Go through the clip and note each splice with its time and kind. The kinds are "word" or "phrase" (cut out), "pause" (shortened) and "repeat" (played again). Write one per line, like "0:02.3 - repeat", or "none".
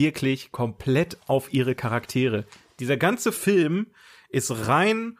none